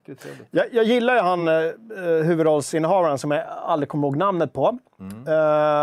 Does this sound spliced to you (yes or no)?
no